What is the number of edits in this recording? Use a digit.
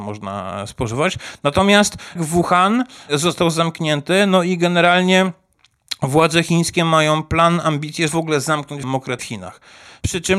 4